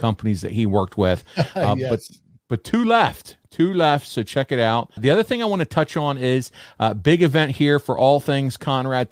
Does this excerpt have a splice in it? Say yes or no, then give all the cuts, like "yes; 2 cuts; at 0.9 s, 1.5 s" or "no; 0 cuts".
yes; 1 cut; at 5.0 s